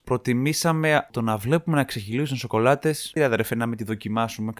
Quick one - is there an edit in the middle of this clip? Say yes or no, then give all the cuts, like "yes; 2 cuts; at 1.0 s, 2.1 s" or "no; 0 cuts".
yes; 2 cuts; at 1.1 s, 3.2 s